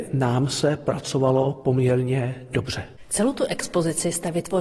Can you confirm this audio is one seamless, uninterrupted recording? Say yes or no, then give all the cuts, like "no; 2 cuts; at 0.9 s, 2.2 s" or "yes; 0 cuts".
yes; 0 cuts